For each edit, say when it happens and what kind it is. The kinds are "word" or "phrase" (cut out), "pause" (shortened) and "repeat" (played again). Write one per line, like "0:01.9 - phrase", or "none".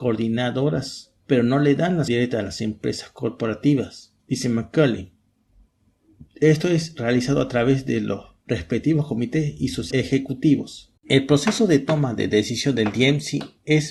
0:01.2 - pause
0:02.1 - word
0:04.2 - pause
0:06.3 - pause
0:09.9 - word
0:11.0 - pause